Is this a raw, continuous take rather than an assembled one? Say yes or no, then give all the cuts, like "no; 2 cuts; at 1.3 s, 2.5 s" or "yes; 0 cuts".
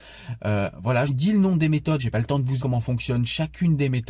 no; 3 cuts; at 1.1 s, 2.0 s, 2.6 s